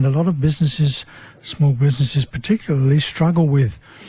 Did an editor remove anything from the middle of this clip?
no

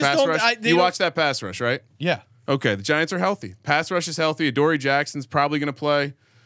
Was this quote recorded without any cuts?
yes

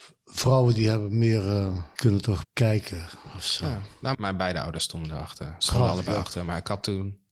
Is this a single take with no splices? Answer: no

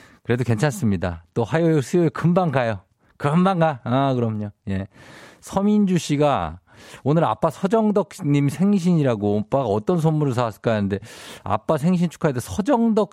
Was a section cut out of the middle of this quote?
no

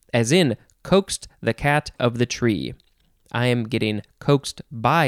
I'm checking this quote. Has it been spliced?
yes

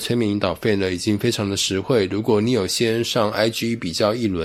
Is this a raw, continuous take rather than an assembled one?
yes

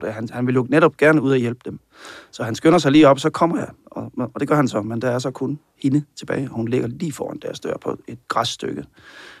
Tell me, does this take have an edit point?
yes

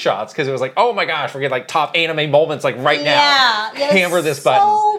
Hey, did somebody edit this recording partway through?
no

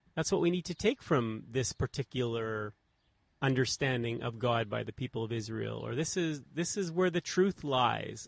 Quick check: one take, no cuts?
yes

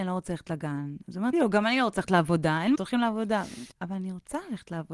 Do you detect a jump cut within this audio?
yes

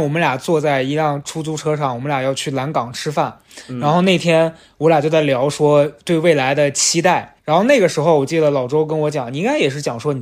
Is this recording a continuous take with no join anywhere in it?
no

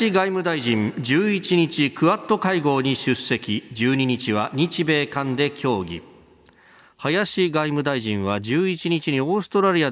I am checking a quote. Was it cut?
no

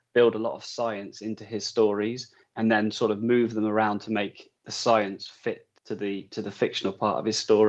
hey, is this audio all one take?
no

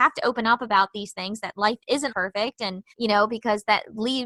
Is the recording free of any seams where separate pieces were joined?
no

